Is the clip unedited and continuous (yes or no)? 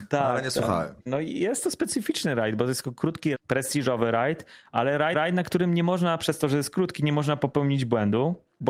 no